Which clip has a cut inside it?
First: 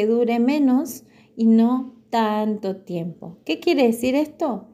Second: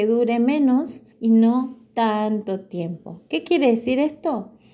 second; 1 cut; at 1.1 s

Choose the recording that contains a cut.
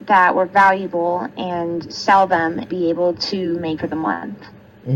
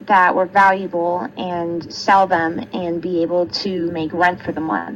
first; 2 cuts; at 2.7 s, 3.8 s

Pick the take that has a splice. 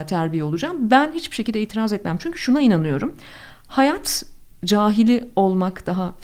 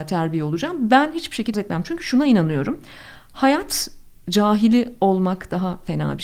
second; 1 cut; at 1.5 s

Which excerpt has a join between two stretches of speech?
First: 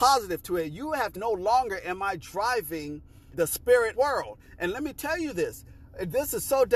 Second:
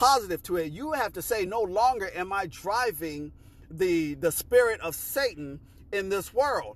first; 3 cuts; at 1.2 s, 3.3 s, 3.9 s

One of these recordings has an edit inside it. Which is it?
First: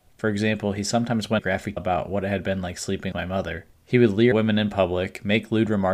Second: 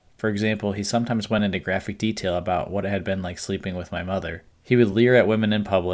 first; 4 cuts; at 1.4 s, 1.8 s, 3.1 s, 4.3 s

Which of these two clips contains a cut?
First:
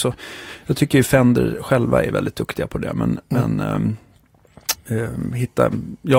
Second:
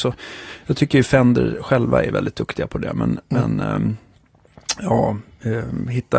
first; 1 cut; at 4.7 s

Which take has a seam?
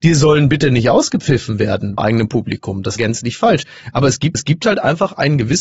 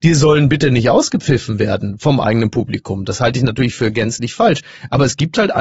first; 3 cuts; at 2.0 s, 3.0 s, 4.3 s

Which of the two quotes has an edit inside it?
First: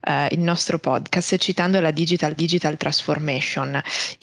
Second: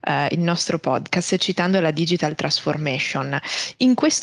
first; 1 cut; at 2.4 s

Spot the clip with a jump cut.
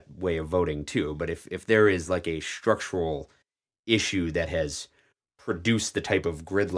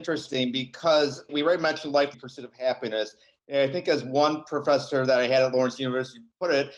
second; 2 cuts; at 1.3 s, 2.1 s

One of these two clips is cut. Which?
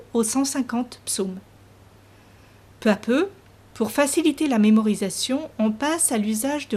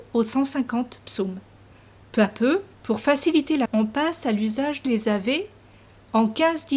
second; 4 cuts; at 1.7 s, 2.7 s, 3.6 s, 4.8 s

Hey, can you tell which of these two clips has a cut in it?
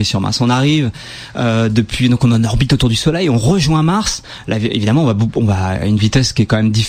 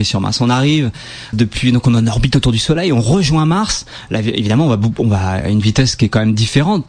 second; 1 cut; at 1.3 s

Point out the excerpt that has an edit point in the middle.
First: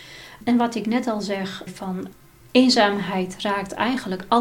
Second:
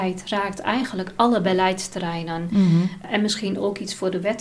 first; 1 cut; at 1.7 s

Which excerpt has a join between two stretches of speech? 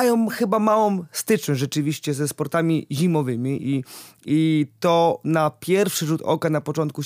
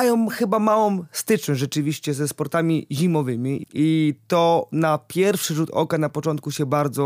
second; 1 cut; at 3.6 s

